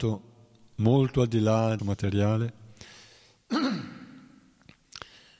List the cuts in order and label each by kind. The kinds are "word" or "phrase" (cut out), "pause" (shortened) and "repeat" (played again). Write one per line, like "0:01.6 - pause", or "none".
0:01.8 - word